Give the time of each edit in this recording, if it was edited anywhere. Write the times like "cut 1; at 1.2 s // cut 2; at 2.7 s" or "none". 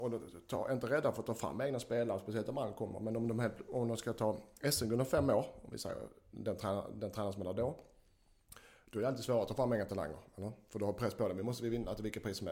none